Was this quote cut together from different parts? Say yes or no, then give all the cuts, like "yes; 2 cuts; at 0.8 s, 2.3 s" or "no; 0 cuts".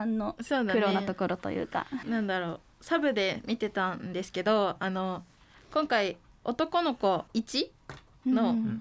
yes; 2 cuts; at 2.0 s, 7.3 s